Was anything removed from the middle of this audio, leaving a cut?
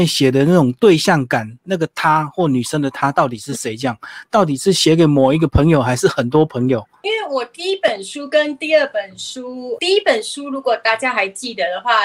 yes; 1 cut; at 9.8 s

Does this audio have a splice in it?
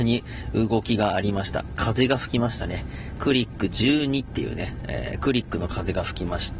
no; 0 cuts

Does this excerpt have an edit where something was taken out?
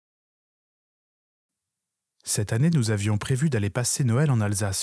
no; 0 cuts

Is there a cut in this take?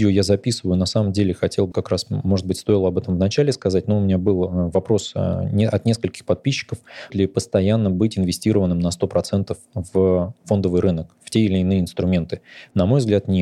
yes; 2 cuts; at 1.7 s, 7.1 s

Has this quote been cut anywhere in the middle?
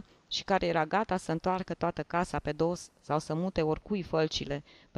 no; 0 cuts

